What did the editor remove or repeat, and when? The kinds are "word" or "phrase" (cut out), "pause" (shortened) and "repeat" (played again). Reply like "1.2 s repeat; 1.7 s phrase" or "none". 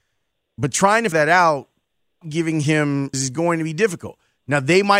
1.1 s word; 2.2 s word; 3.1 s word